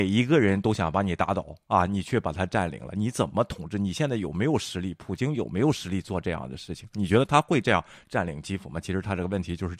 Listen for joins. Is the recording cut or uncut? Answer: uncut